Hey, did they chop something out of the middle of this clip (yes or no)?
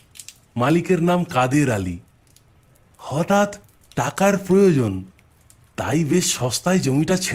no